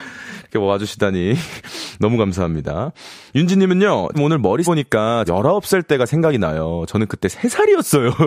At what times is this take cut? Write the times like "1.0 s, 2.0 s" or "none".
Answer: 4.1 s, 4.6 s, 5.3 s